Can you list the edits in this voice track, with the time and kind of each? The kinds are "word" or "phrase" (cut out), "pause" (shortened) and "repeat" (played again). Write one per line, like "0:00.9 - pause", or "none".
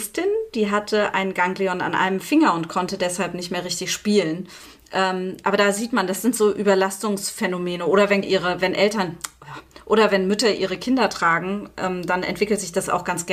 0:08.2 - word

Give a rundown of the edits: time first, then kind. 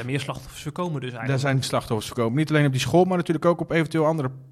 0:01.6 - phrase

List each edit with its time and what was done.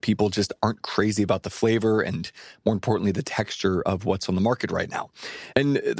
none

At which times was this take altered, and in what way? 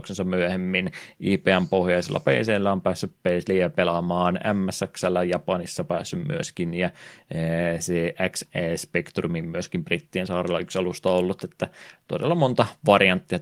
none

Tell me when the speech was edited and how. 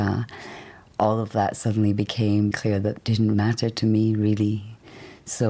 0:02.5 - word
0:03.0 - word
0:03.3 - word

